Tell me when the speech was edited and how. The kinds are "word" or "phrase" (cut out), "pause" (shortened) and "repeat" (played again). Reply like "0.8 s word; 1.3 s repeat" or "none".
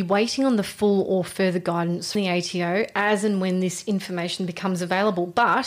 2.1 s word